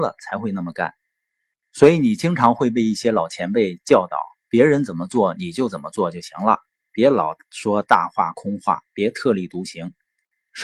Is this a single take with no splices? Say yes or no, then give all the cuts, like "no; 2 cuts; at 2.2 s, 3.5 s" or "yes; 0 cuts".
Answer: yes; 0 cuts